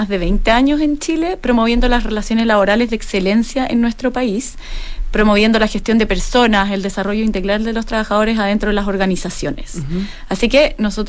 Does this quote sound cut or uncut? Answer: uncut